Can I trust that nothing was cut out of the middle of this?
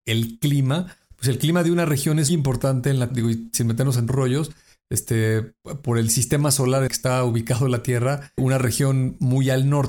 no; 5 cuts; at 2.3 s, 3.1 s, 4.1 s, 6.9 s, 8.4 s

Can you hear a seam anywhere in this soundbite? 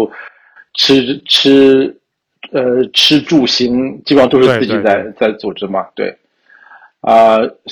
no; 0 cuts

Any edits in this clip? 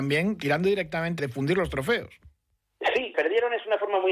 yes; 2 cuts; at 1.2 s, 3.1 s

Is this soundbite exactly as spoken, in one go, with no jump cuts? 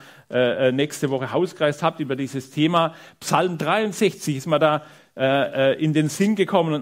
yes; 0 cuts

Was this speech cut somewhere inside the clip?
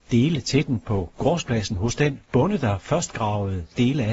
no; 0 cuts

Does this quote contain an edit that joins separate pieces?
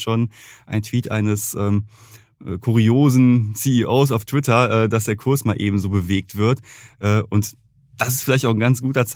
no; 0 cuts

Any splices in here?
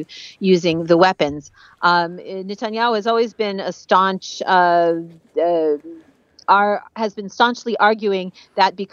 no; 0 cuts

